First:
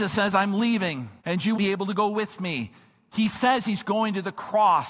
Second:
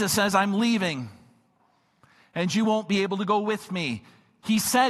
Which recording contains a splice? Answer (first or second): first